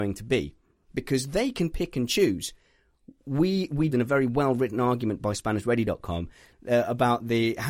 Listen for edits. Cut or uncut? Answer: cut